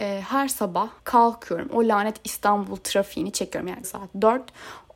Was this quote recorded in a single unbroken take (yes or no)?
no